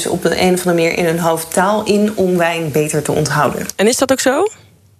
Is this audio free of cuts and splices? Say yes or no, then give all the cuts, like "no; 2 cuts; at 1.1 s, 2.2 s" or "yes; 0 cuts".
yes; 0 cuts